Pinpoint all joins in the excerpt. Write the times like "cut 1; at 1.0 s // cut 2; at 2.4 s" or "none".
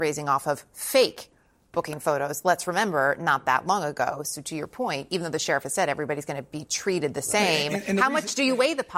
none